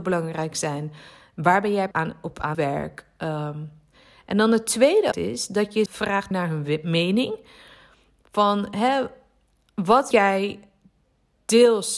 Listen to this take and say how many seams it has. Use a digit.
6